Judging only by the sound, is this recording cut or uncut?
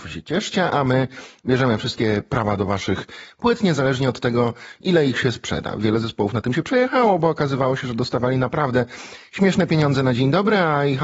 uncut